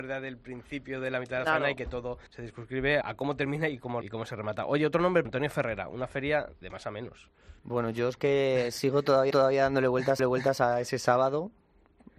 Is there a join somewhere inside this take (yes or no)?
yes